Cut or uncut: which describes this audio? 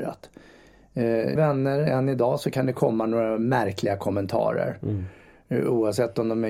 cut